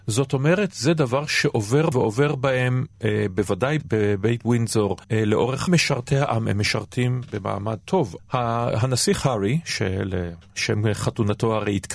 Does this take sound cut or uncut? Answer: cut